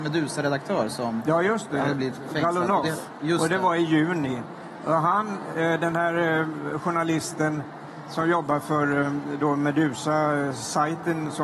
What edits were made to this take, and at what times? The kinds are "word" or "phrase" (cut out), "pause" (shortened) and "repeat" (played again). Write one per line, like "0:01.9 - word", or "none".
none